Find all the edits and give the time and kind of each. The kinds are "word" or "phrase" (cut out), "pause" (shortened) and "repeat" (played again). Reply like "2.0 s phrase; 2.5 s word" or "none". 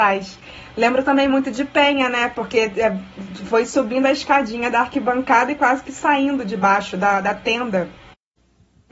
none